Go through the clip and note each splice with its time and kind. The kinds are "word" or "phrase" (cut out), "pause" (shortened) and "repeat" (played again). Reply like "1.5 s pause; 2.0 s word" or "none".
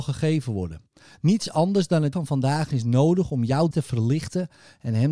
2.1 s word; 3.7 s word

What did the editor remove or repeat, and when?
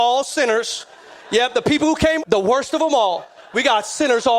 2.2 s word

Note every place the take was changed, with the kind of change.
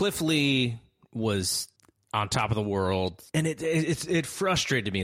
1.8 s pause; 3.3 s pause

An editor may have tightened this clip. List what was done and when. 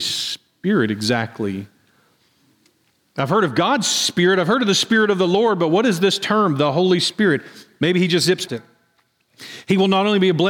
8.5 s word

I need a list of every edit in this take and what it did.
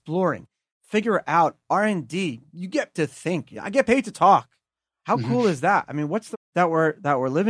2.9 s word; 6.3 s word

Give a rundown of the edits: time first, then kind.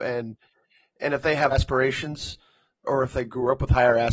1.5 s word; 2.8 s word

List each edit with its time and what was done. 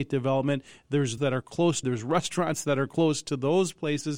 1.2 s word; 1.8 s word

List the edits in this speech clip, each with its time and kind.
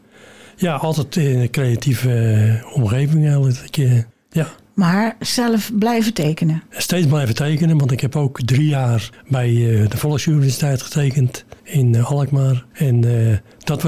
4.1 s pause; 6.7 s pause; 9.1 s pause; 11.6 s pause; 12.7 s pause

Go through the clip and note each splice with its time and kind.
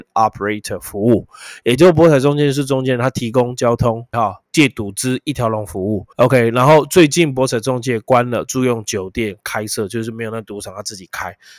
4.1 s phrase; 4.5 s pause; 6.1 s pause

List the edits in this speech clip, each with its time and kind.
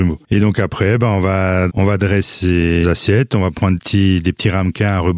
1.7 s word; 2.8 s word; 3.8 s word

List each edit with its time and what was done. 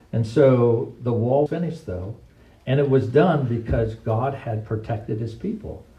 1.5 s word

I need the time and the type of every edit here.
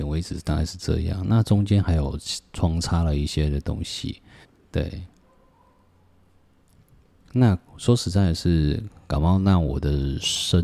4.4 s pause; 7.7 s pause

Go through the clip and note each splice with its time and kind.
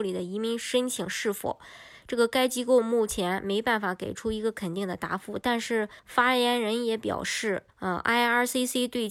6.0 s pause; 7.7 s pause

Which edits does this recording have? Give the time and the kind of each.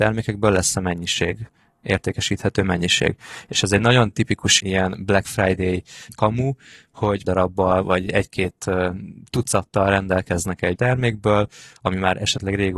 4.6 s word; 7.2 s word; 10.8 s word

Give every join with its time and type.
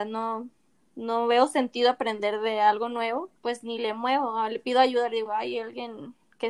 3.4 s pause

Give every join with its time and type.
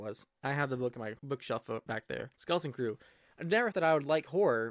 1.2 s pause; 2.3 s pause; 3.7 s word

